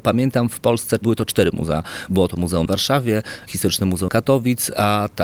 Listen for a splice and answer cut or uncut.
cut